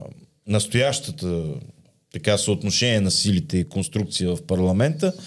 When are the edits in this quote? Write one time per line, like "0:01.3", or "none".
none